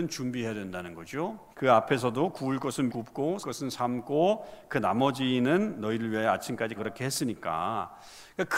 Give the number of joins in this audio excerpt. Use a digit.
4